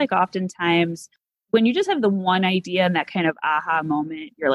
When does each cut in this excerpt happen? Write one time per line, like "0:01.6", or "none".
none